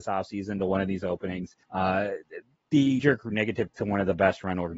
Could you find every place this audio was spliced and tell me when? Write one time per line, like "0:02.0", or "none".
0:01.6
0:03.0
0:03.7